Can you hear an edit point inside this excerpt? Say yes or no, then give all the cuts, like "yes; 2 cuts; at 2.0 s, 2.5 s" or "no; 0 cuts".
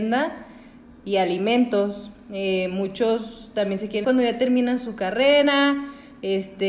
yes; 1 cut; at 4.0 s